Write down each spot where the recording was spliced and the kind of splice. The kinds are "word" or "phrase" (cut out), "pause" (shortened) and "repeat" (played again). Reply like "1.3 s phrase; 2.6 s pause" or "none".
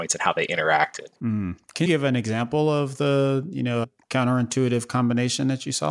1.2 s pause; 1.9 s word; 3.8 s word